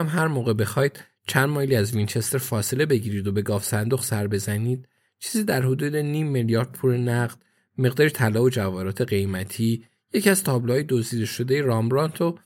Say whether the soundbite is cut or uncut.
uncut